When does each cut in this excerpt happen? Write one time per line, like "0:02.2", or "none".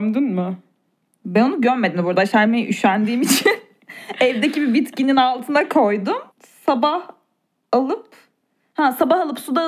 0:06.3